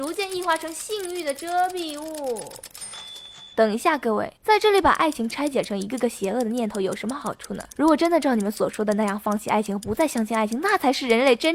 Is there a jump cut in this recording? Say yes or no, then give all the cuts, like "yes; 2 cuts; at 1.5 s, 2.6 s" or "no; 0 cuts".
yes; 2 cuts; at 3.5 s, 4.4 s